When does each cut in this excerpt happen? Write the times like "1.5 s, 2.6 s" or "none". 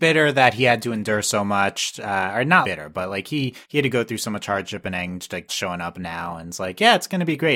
2.6 s, 3.6 s, 5.5 s

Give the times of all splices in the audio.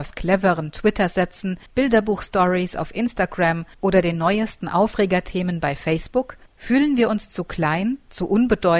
1.7 s, 3.7 s, 6.5 s

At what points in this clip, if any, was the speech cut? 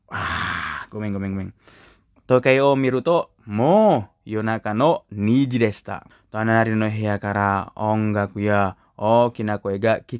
2.2 s, 6.1 s

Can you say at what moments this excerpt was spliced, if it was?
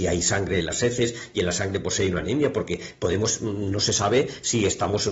none

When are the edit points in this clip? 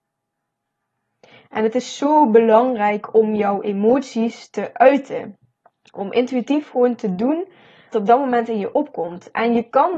7.9 s

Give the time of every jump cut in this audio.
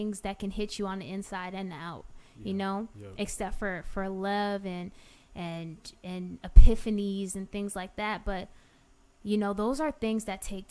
none

